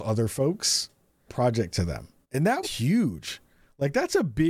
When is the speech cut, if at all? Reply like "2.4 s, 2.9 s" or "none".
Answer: 1.3 s, 2.2 s, 2.6 s